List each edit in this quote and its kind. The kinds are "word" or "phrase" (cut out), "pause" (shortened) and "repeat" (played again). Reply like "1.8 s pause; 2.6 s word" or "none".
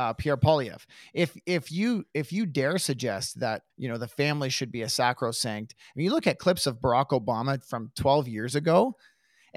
3.7 s pause